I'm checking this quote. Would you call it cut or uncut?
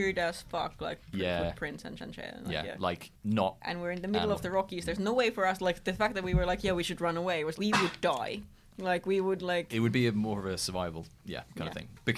cut